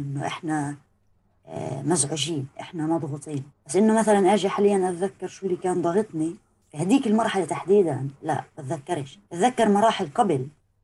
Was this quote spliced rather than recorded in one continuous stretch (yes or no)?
yes